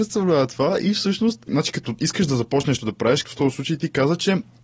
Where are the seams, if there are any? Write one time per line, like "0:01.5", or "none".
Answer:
0:02.8
0:03.2